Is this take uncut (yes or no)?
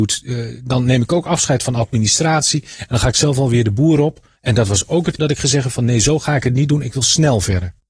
no